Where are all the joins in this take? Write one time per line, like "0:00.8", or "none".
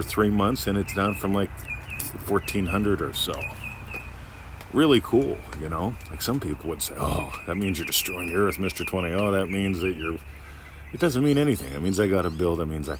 none